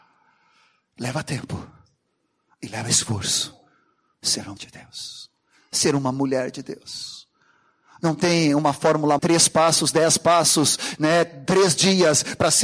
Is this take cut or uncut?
cut